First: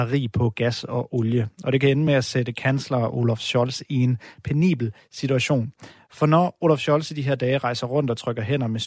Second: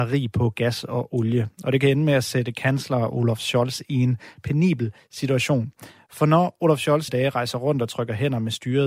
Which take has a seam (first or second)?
second